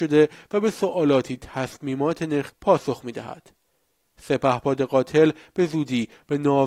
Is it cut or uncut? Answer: cut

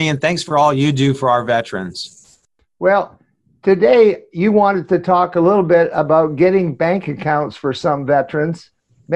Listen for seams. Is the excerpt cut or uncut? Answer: uncut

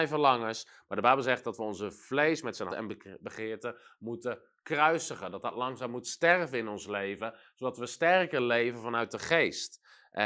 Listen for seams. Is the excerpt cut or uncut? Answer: cut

